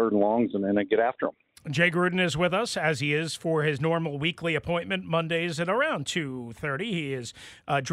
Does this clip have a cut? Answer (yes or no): no